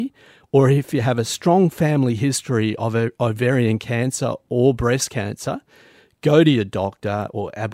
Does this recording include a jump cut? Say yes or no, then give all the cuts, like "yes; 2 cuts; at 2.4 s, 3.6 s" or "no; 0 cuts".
no; 0 cuts